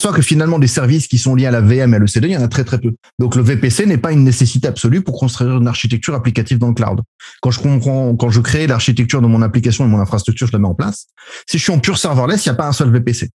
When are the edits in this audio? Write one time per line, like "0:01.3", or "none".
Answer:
0:03.0

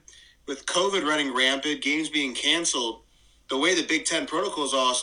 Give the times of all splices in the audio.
none

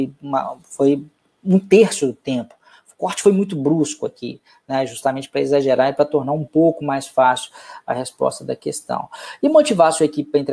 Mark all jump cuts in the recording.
none

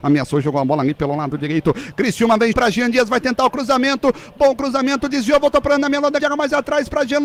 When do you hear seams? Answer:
0:02.5
0:06.2

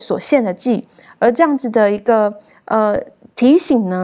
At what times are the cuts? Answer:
none

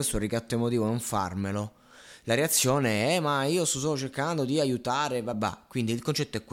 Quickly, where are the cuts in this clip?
0:05.3

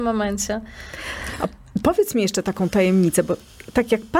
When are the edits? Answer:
none

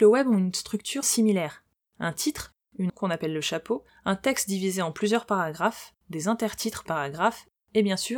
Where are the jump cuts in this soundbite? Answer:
0:01.0
0:02.9
0:03.9
0:06.0
0:06.9

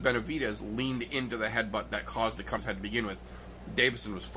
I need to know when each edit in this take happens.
0:02.6

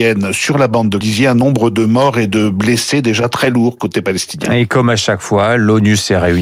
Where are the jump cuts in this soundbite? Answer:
0:01.0

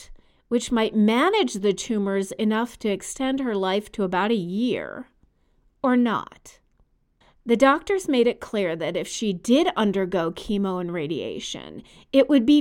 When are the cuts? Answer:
none

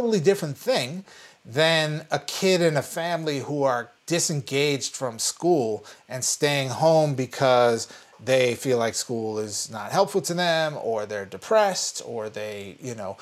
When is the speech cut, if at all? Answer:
none

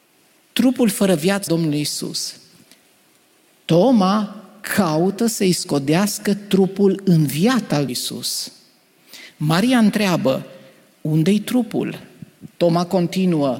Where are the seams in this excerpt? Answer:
0:01.5
0:07.9

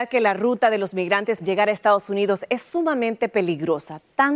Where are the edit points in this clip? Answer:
0:01.4

